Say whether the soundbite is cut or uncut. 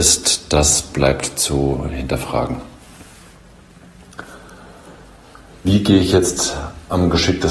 uncut